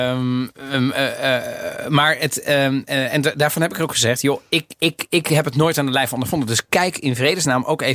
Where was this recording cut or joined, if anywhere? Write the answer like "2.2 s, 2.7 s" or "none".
none

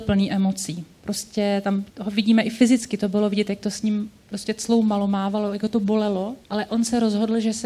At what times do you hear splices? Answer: 1.9 s, 4.2 s, 6.4 s

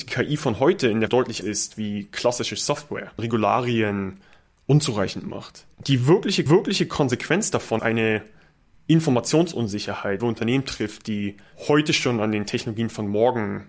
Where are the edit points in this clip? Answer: 1.1 s, 1.4 s, 3.2 s, 5.7 s, 6.5 s, 7.8 s, 10.2 s

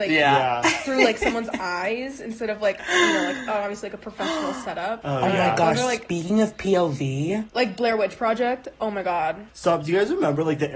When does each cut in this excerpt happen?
none

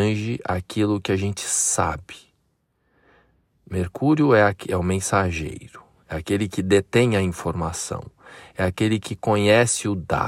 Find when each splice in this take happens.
none

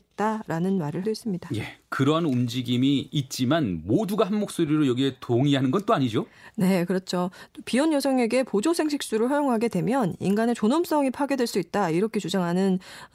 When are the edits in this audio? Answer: 1.0 s

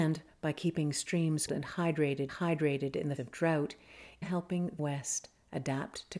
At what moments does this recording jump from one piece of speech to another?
1.5 s, 2.3 s, 3.2 s, 4.2 s, 4.8 s

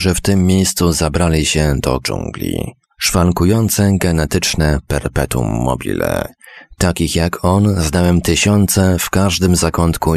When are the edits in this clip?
2.0 s

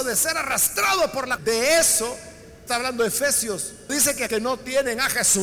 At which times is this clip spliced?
1.4 s, 2.7 s, 3.9 s, 4.3 s

